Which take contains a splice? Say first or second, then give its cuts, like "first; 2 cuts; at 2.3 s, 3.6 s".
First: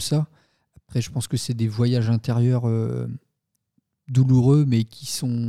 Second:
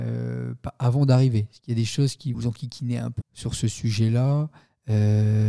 second; 2 cuts; at 2.3 s, 3.2 s